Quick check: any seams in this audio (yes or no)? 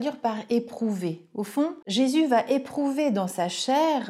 no